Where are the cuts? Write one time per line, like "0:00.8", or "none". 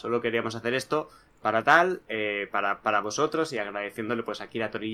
none